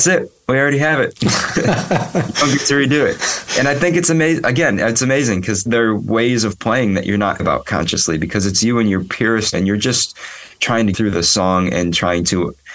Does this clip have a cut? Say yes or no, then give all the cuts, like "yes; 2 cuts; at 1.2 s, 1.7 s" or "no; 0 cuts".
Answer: yes; 4 cuts; at 5.7 s, 7.4 s, 9.5 s, 10.9 s